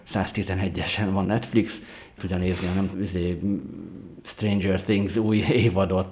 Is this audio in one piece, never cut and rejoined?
no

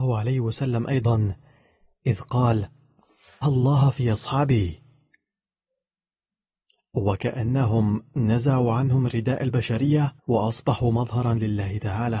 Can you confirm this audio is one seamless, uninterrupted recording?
no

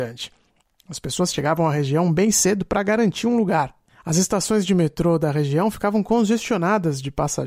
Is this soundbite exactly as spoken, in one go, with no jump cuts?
yes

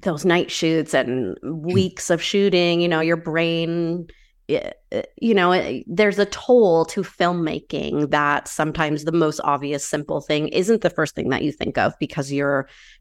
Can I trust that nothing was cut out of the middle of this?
yes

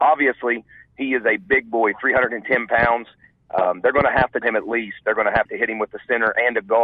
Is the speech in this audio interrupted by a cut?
yes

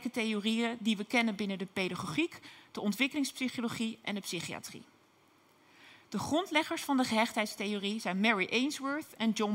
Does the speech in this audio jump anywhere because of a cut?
no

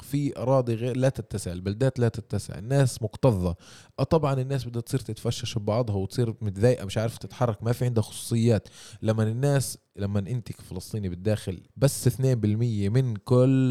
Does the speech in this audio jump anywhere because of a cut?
yes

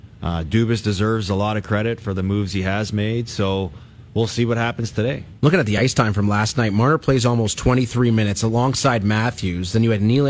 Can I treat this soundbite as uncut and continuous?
yes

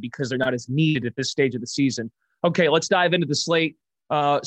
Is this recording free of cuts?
yes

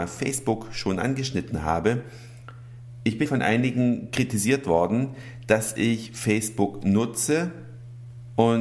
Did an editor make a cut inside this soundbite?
yes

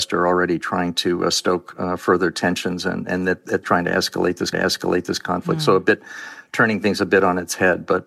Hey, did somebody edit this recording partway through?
yes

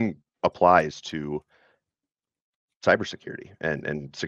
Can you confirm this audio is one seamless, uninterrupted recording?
yes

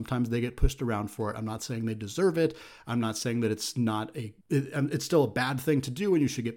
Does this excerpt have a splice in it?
yes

